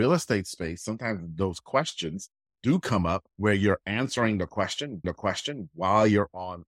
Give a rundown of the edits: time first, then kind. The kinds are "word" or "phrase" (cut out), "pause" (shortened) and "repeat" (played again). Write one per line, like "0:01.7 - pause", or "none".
0:03.3 - pause
0:05.0 - repeat